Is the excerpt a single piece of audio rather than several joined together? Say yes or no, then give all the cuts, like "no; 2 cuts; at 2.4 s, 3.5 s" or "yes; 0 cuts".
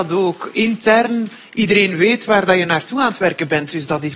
yes; 0 cuts